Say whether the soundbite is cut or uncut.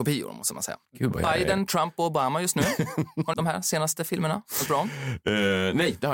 cut